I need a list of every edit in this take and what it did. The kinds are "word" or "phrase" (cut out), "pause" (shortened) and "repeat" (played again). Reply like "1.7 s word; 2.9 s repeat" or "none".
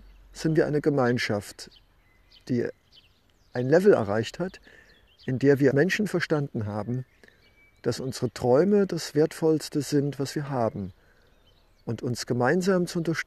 5.7 s word